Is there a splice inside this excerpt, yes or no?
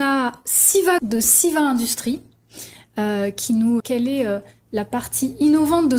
yes